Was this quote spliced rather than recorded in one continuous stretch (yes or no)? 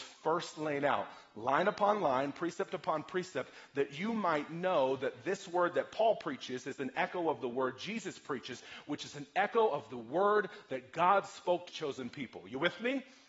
yes